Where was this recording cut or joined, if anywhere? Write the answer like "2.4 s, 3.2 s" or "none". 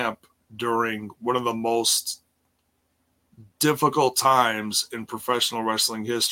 none